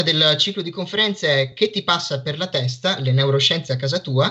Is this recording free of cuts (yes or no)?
yes